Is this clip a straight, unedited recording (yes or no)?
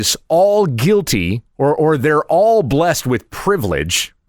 yes